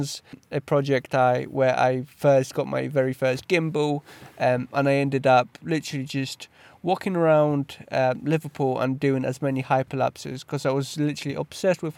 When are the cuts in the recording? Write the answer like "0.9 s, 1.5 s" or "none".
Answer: none